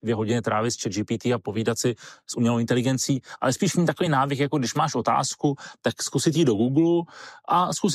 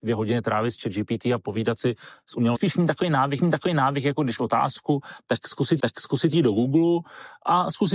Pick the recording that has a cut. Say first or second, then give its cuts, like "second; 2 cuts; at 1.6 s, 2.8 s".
second; 4 cuts; at 2.5 s, 3.4 s, 4.4 s, 5.8 s